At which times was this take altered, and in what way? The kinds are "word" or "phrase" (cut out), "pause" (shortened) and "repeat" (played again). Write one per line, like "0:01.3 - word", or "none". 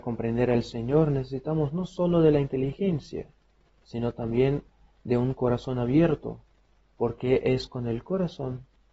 none

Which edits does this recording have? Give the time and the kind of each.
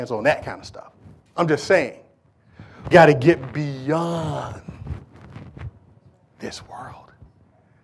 0:01.3 - pause
0:02.9 - word

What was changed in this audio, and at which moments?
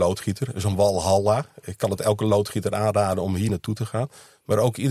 none

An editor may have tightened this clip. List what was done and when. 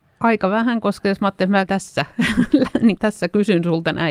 0:01.7 - word
0:03.0 - word

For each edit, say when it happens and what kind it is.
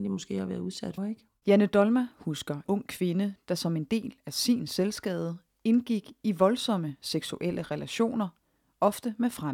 0:01.0 - word
0:02.7 - word

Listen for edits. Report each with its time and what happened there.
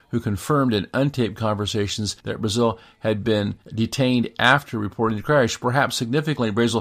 0:02.2 - pause
0:03.6 - pause

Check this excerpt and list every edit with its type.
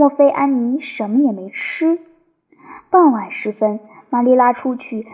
none

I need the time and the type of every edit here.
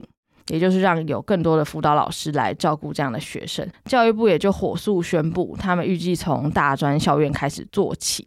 0:03.7 - pause

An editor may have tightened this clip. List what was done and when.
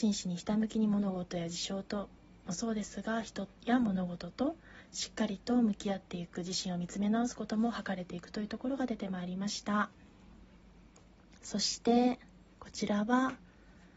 none

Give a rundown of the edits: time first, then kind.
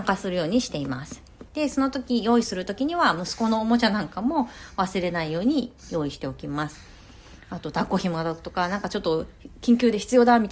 0:01.5 - pause

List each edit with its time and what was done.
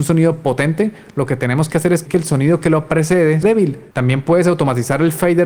0:02.1 - word
0:03.4 - word
0:03.9 - pause

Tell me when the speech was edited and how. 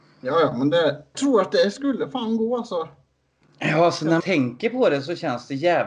0:01.1 - word
0:04.2 - word

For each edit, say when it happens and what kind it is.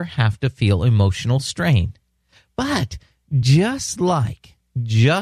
none

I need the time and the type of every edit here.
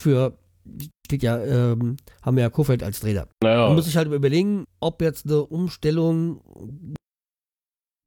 0:03.3 - pause
0:04.6 - word

